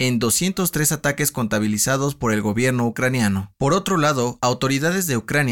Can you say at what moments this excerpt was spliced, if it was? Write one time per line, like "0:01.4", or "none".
none